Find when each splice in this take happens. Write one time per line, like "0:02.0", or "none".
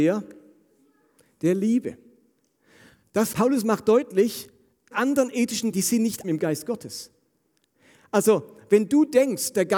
0:03.3
0:04.9
0:05.7
0:06.2